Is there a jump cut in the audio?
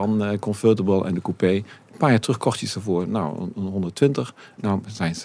no; 0 cuts

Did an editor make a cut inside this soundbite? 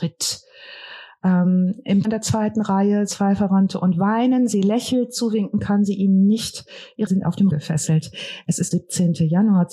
yes; 5 cuts; at 2.0 s, 3.1 s, 7.1 s, 7.5 s, 8.7 s

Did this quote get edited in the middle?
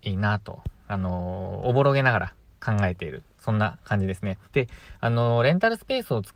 yes; 1 cut; at 4.5 s

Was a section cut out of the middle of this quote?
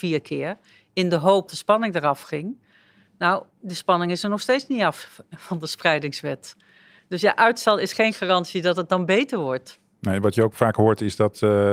yes; 1 cut; at 1.5 s

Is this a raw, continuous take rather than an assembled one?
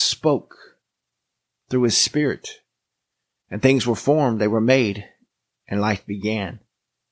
yes; 0 cuts

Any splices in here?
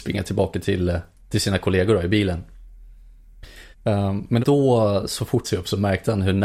yes; 4 cuts; at 1.2 s, 3.7 s, 4.4 s, 5.4 s

